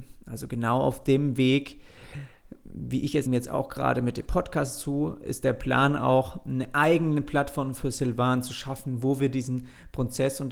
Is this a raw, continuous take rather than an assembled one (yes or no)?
no